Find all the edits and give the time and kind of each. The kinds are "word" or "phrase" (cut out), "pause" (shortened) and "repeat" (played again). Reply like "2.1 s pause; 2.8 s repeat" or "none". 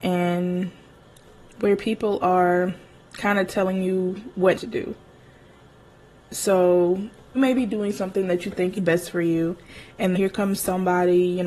4.5 s word; 7.3 s word; 8.7 s word; 10.1 s word